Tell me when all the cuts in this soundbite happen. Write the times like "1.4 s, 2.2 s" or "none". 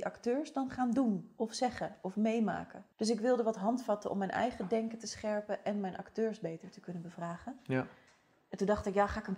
2.9 s